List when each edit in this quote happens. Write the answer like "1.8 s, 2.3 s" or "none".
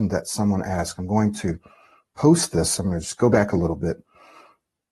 none

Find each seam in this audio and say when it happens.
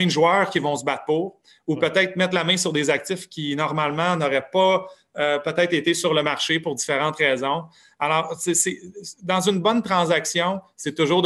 none

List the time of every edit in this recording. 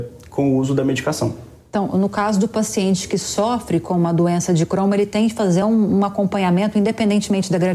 none

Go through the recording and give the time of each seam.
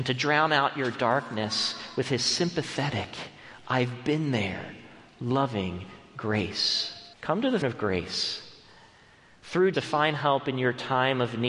7.1 s, 7.6 s, 9.7 s

